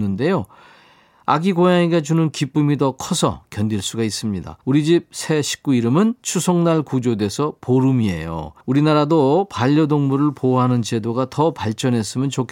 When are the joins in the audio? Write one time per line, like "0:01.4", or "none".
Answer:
0:04.6
0:08.6